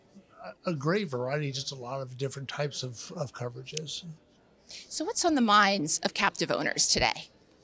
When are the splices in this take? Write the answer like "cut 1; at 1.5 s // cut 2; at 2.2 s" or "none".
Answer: none

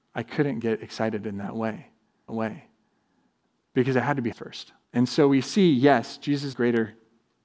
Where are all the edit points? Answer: cut 1; at 2.3 s // cut 2; at 4.3 s // cut 3; at 4.8 s // cut 4; at 6.5 s

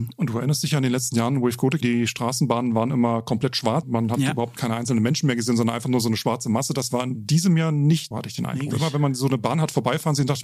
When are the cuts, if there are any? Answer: cut 1; at 1.8 s // cut 2; at 3.8 s // cut 3; at 8.1 s // cut 4; at 8.7 s

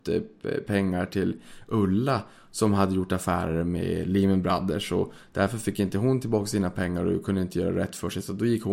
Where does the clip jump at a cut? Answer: none

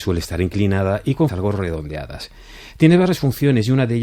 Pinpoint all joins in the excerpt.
cut 1; at 1.3 s

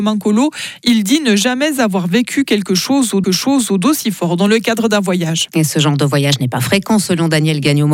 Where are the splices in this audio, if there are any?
cut 1; at 3.2 s

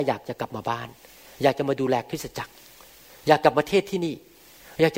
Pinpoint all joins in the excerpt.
none

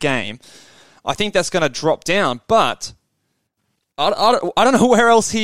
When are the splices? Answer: none

